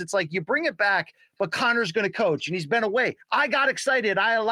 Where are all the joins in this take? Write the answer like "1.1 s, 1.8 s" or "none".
3.2 s